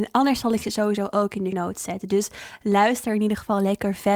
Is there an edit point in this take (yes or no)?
yes